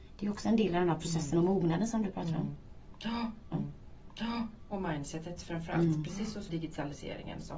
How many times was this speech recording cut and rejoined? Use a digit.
2